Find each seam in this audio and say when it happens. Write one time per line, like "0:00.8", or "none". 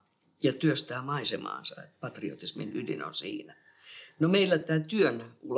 none